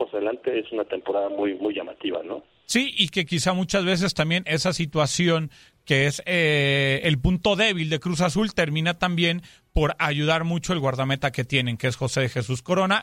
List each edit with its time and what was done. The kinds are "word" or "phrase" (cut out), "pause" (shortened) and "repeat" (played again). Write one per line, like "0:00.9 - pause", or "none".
none